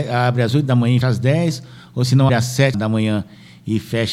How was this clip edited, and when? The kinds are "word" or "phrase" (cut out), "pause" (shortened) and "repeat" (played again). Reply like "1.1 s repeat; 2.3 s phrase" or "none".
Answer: 1.0 s word; 2.3 s word; 2.7 s word